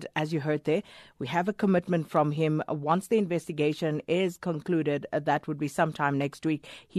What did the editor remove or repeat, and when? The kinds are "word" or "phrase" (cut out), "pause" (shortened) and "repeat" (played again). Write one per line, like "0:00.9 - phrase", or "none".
none